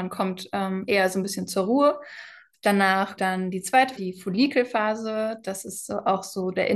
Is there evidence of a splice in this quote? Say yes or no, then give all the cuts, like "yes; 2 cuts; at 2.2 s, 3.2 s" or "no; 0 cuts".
yes; 2 cuts; at 3.2 s, 4.0 s